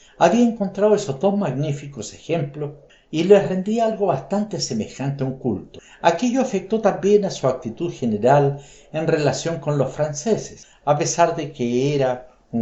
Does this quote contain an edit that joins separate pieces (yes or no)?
no